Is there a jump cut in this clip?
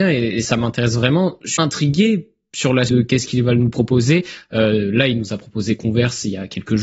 yes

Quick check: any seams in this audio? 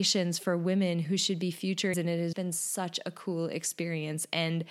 yes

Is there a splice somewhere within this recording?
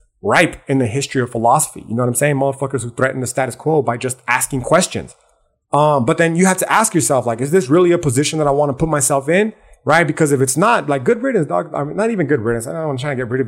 no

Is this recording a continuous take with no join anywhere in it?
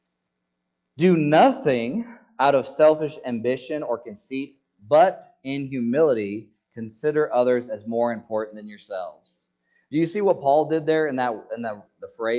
yes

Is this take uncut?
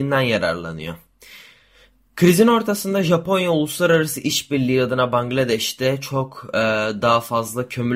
yes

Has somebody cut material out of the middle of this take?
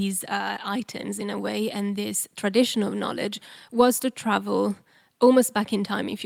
no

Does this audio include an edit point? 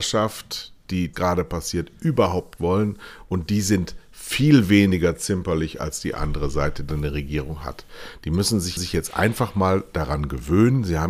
yes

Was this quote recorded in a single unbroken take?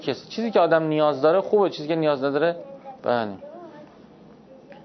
no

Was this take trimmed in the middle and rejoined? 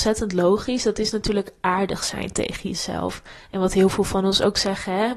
no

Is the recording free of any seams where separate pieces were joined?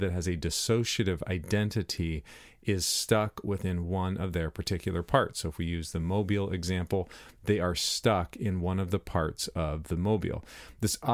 yes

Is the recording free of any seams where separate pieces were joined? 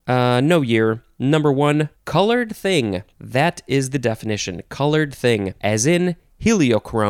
no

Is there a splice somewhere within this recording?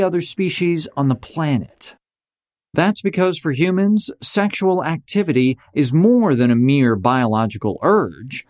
no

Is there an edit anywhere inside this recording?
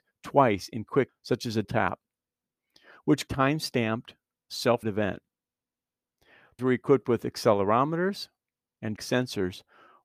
yes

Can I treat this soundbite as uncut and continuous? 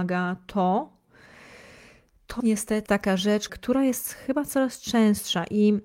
no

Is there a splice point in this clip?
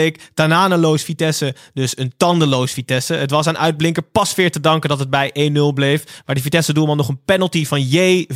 no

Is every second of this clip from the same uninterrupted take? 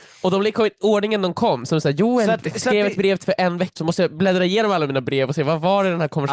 no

